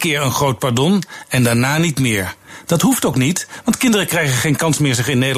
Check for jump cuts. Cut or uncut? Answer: uncut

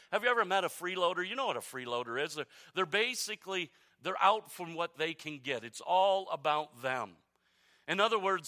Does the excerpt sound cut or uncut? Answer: uncut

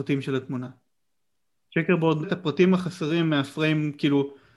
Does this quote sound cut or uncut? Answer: cut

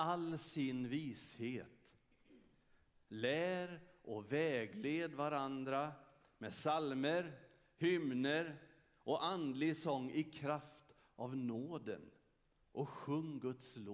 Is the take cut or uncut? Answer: uncut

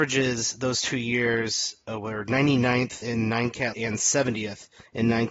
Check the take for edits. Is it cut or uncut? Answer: cut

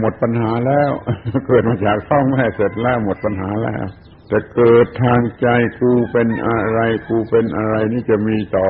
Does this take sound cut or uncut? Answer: cut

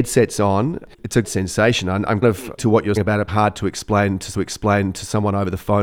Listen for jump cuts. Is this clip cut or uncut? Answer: cut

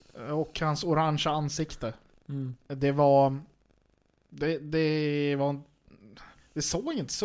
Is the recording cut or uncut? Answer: uncut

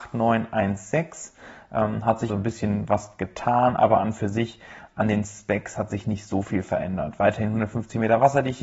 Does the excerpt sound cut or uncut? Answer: cut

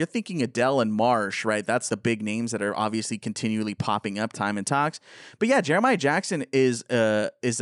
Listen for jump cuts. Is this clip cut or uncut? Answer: cut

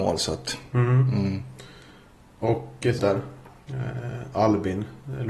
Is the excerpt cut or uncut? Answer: cut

